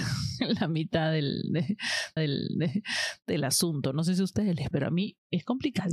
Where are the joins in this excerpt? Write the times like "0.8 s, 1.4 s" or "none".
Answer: 2.2 s, 4.7 s

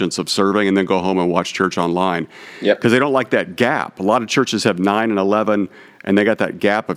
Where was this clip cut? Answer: none

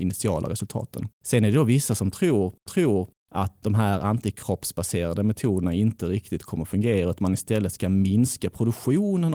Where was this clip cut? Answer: 1.1 s, 2.7 s

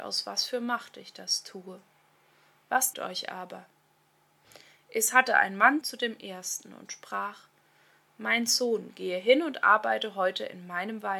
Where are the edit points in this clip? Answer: 2.9 s, 5.8 s

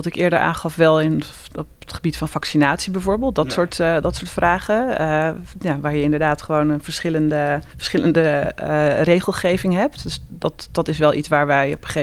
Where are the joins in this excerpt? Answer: 7.7 s

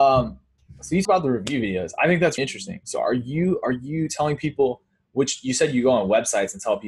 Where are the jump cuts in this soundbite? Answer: 1.0 s, 2.4 s

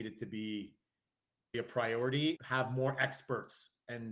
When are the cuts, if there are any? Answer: 1.5 s, 2.4 s

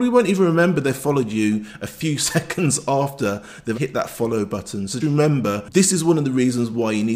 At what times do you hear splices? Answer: 3.7 s, 5.0 s

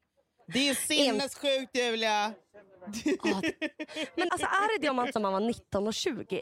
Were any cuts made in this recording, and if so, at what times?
4.3 s, 5.1 s

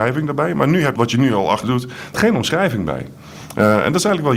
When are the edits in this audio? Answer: 1.0 s, 1.6 s, 2.1 s

